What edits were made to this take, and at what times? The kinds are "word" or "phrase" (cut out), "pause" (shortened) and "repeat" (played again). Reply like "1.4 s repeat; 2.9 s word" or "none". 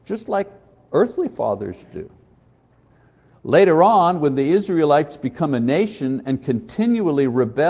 none